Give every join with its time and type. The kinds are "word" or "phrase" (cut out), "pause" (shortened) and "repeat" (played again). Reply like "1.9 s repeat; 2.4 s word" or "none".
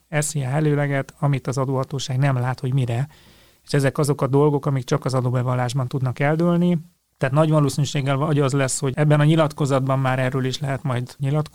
none